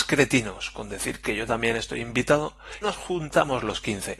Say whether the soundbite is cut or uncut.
cut